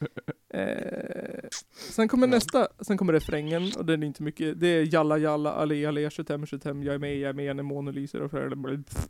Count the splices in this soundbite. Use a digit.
1